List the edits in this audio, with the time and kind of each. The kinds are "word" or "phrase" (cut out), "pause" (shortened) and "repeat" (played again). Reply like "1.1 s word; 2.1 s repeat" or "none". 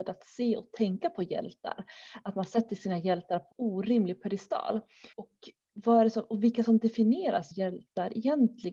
3.5 s word; 5.1 s pause; 7.5 s word